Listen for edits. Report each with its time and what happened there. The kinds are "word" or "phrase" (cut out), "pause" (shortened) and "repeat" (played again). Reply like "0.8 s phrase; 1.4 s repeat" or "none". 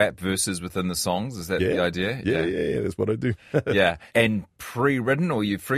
4.1 s pause